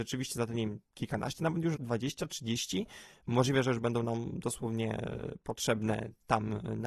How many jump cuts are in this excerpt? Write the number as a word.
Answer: one